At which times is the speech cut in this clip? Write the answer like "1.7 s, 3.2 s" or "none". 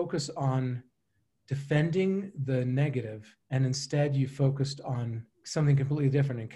3.4 s, 5.3 s